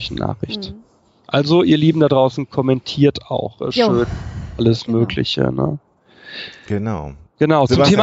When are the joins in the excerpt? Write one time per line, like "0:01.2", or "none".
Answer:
none